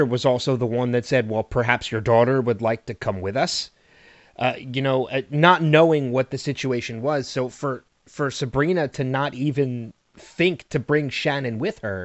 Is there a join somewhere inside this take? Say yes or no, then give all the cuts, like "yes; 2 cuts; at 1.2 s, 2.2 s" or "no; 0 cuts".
no; 0 cuts